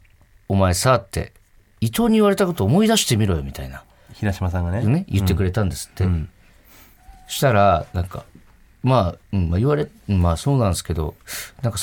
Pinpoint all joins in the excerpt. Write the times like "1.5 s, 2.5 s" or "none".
8.5 s